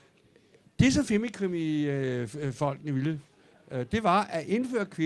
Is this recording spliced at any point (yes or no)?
no